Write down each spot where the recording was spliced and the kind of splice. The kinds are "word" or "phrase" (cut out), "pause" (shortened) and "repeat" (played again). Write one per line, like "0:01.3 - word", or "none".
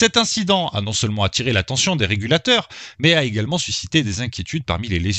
none